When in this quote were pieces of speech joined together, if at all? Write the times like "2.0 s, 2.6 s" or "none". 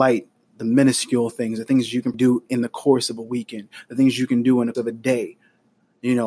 2.1 s, 4.7 s